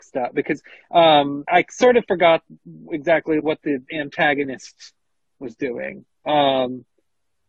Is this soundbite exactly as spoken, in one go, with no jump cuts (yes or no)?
no